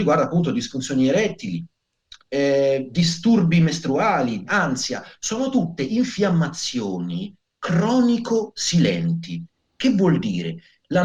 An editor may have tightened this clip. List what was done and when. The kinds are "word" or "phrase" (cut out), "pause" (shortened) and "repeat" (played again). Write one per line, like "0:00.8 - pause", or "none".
0:02.2 - pause
0:04.5 - word